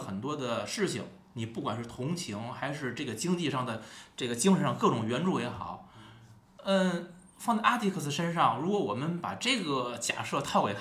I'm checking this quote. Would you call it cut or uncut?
uncut